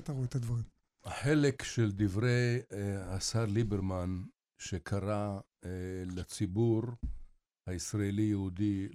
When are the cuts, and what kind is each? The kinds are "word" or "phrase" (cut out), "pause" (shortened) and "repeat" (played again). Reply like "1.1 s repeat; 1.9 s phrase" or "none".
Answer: none